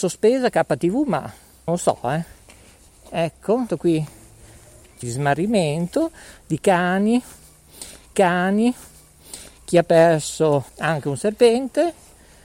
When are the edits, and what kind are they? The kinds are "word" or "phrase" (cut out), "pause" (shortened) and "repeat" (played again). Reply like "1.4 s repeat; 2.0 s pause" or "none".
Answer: 1.7 s word; 3.7 s word; 5.0 s phrase; 8.1 s repeat; 10.7 s pause